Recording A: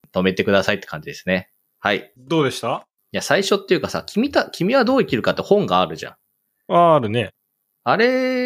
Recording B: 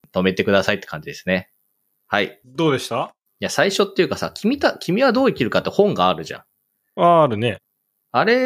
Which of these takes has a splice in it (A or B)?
A